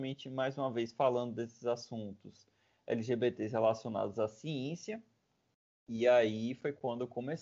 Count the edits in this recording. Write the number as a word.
zero